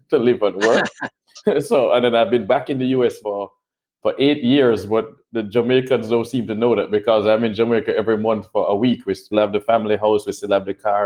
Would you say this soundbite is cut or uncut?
cut